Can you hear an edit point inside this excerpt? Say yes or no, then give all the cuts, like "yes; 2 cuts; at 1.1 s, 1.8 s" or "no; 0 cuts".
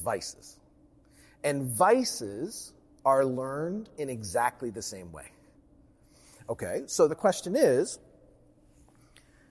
yes; 1 cut; at 7.1 s